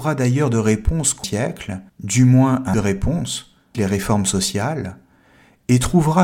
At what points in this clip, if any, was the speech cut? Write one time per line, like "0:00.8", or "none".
0:01.2
0:01.9
0:02.7
0:03.7